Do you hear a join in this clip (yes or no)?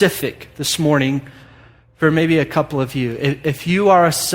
no